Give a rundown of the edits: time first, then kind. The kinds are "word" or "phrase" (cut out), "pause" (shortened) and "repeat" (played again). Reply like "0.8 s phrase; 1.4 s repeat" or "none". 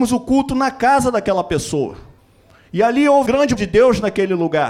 2.2 s pause; 3.3 s word; 3.6 s word